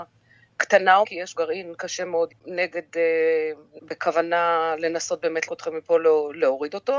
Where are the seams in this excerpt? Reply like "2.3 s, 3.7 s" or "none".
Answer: 1.0 s, 1.3 s, 2.3 s, 3.8 s, 5.5 s